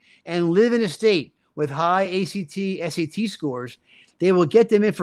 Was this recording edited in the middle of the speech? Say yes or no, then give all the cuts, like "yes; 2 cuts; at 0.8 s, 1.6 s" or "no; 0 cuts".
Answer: no; 0 cuts